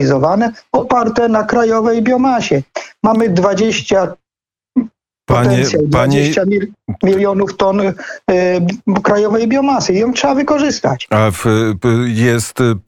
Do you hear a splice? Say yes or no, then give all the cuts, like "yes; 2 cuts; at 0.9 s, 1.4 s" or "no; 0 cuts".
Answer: no; 0 cuts